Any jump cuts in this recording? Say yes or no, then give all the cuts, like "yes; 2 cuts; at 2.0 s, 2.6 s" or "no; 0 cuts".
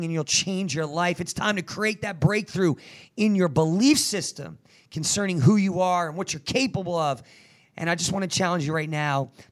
no; 0 cuts